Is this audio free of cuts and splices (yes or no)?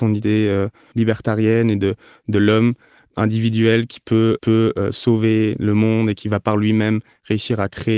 no